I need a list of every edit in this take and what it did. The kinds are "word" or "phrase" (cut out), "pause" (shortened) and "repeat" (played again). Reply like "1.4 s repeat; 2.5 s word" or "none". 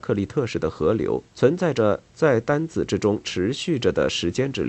1.3 s pause